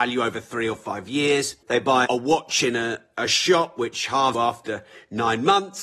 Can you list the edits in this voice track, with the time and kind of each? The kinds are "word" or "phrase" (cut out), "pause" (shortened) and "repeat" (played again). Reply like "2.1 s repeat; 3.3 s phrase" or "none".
1.6 s pause; 2.1 s word; 4.3 s phrase